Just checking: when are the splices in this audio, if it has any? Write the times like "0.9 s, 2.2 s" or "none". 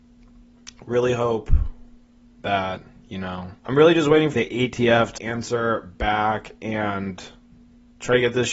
3.6 s, 4.3 s, 5.2 s